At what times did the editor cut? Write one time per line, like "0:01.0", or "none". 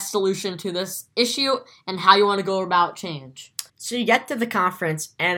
0:03.7